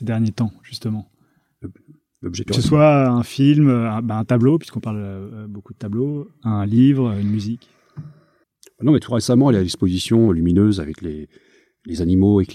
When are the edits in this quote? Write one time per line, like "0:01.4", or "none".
0:02.5